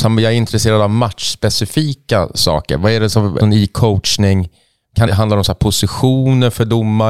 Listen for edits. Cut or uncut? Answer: cut